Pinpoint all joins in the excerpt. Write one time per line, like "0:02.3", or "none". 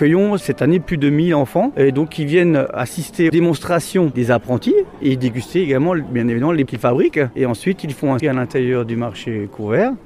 0:03.3
0:04.1
0:06.7
0:08.2